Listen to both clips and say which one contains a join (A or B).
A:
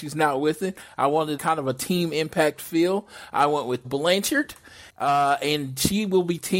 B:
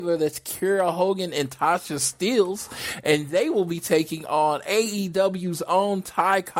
A